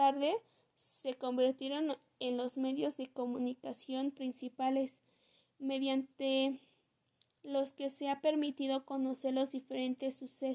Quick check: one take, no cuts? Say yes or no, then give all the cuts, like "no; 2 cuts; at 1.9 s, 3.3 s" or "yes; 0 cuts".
yes; 0 cuts